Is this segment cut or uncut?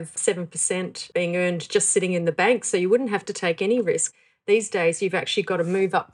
uncut